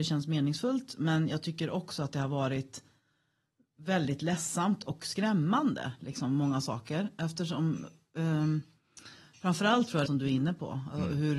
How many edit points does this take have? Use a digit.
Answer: 1